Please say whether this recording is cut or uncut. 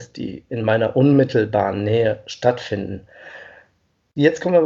uncut